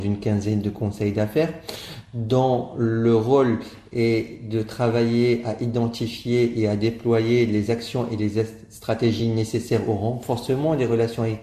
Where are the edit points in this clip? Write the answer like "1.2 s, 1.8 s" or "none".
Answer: none

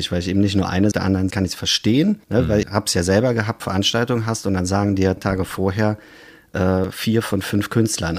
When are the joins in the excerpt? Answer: 0.9 s, 1.3 s, 2.2 s, 2.6 s, 3.6 s, 5.2 s

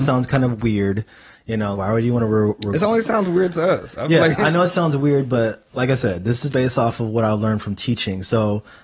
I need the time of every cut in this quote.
1.7 s, 6.5 s

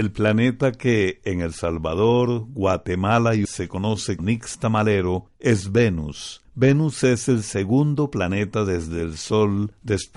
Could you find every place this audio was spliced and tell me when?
3.4 s, 4.2 s

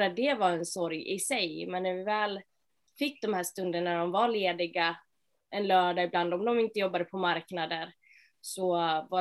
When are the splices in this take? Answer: none

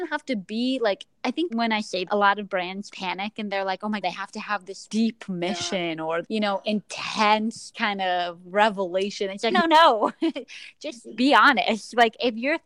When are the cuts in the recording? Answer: 1.5 s, 2.1 s, 2.9 s, 4.0 s, 4.9 s, 6.2 s, 9.5 s, 11.2 s

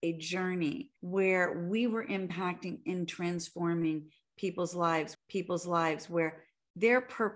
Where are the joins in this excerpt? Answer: 1.0 s, 5.1 s

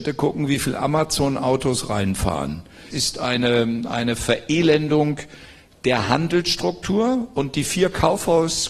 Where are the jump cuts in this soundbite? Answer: 2.9 s

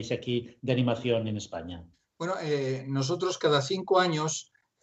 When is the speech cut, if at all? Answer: none

